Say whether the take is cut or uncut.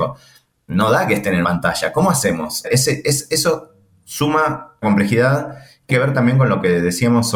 cut